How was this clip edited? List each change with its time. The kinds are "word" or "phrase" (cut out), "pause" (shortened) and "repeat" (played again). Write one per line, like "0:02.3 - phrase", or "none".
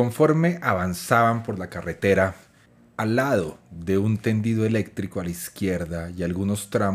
0:02.7 - pause